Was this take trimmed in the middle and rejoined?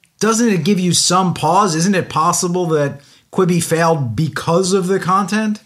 no; 0 cuts

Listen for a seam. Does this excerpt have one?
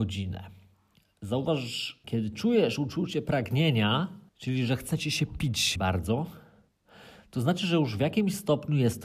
yes; 3 cuts; at 2.0 s, 4.3 s, 5.8 s

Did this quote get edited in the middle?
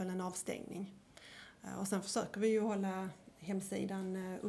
no; 0 cuts

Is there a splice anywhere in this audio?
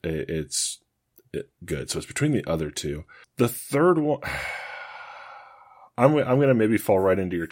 no; 0 cuts

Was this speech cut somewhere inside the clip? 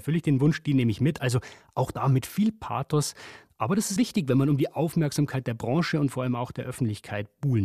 yes; 1 cut; at 4.0 s

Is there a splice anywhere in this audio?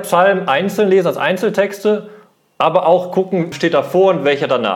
yes; 1 cut; at 3.5 s

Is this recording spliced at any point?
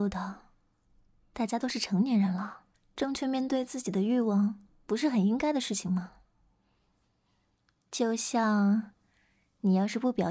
yes; 1 cut; at 2.7 s

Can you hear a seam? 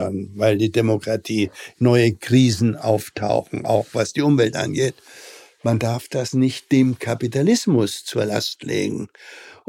yes; 1 cut; at 1.8 s

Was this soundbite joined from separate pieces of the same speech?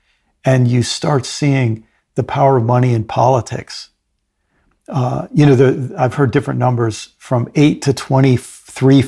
no; 0 cuts

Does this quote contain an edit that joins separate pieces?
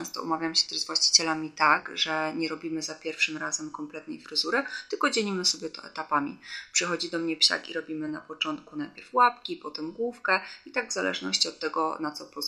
no; 0 cuts

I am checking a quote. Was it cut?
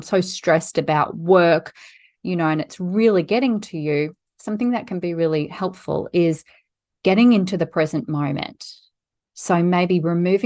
no; 0 cuts

